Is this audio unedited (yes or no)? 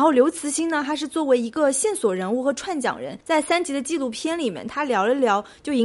no